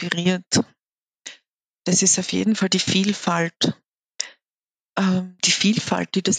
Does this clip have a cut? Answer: no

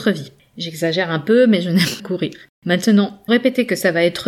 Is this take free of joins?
no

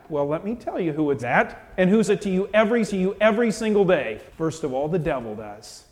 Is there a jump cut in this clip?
yes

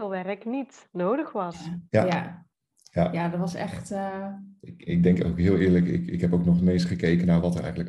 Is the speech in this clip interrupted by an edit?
yes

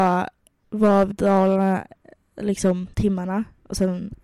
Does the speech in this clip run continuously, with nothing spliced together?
no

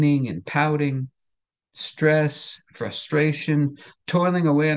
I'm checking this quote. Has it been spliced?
no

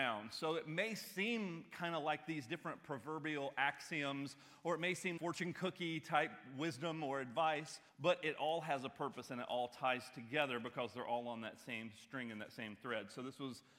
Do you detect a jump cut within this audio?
yes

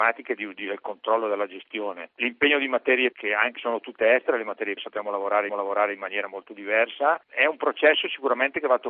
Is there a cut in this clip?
yes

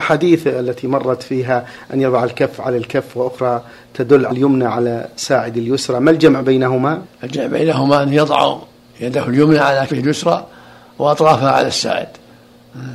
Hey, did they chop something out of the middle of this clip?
yes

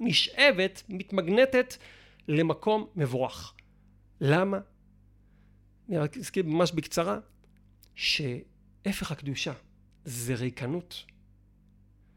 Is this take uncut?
no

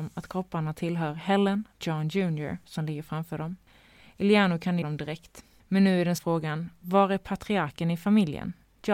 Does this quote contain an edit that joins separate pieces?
yes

